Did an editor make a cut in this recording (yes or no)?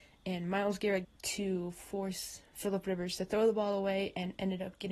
yes